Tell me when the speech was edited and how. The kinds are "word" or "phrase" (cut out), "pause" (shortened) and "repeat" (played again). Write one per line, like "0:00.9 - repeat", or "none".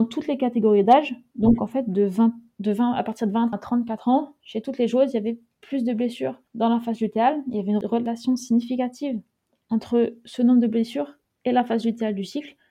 0:03.5 - word
0:06.5 - pause